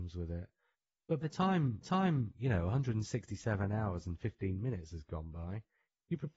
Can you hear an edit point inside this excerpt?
yes; 2 cuts; at 1.2 s, 1.8 s

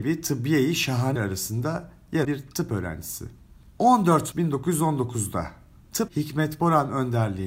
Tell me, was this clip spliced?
yes; 4 cuts; at 1.2 s, 2.2 s, 4.3 s, 6.1 s

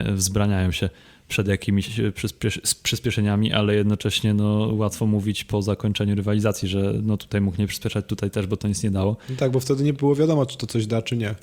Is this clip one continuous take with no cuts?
yes; 0 cuts

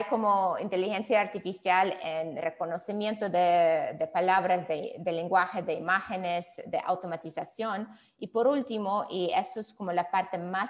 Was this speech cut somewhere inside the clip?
no; 0 cuts

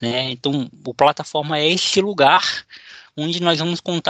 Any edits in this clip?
no; 0 cuts

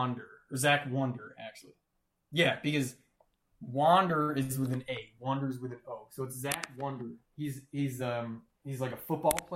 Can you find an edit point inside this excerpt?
no; 0 cuts

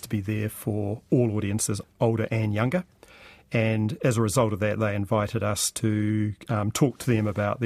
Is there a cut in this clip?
no; 0 cuts

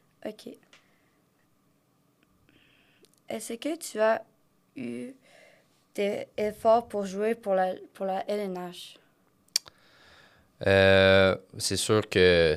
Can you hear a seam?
no; 0 cuts

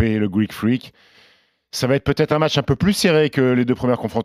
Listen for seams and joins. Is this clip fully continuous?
yes; 0 cuts

